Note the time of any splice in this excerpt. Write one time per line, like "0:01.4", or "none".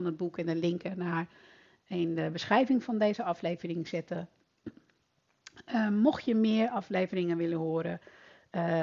none